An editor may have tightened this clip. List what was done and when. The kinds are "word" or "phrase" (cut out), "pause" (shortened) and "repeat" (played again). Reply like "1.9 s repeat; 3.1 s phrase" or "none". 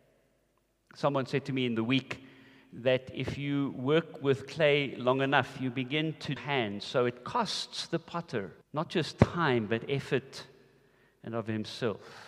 6.4 s phrase; 8.6 s pause